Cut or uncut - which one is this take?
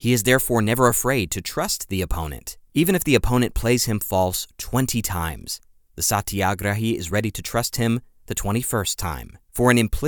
uncut